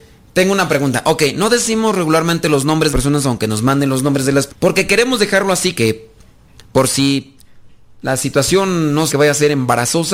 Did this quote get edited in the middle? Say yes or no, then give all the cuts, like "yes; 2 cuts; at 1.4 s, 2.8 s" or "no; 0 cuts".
yes; 4 cuts; at 2.9 s, 4.5 s, 5.7 s, 9.1 s